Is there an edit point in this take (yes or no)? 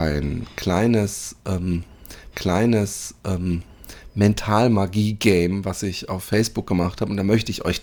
yes